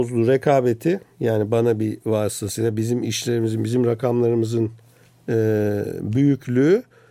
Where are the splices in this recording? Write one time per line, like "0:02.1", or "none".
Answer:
none